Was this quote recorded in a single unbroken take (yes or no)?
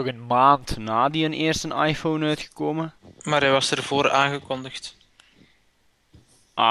yes